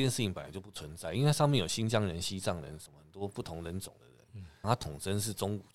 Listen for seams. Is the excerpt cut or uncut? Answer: cut